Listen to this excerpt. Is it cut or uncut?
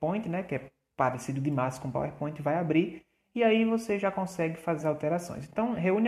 cut